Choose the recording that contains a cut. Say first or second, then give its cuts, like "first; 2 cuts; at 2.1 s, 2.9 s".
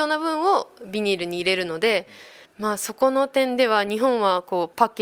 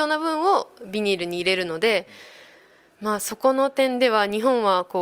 first; 1 cut; at 2.4 s